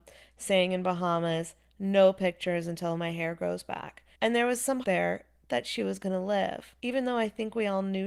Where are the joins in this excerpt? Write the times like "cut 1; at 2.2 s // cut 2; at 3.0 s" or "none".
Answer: cut 1; at 4.1 s // cut 2; at 4.8 s // cut 3; at 6.8 s